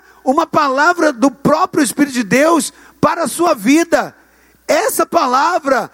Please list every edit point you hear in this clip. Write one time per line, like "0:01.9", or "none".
none